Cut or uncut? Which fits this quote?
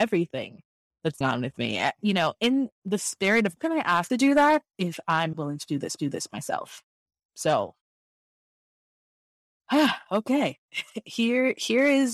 cut